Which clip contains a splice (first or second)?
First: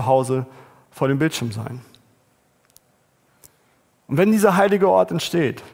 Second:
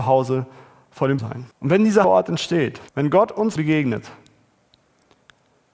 second